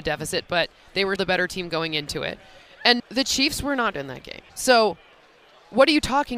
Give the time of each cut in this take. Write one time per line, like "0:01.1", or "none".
0:01.2
0:03.0
0:03.9
0:04.5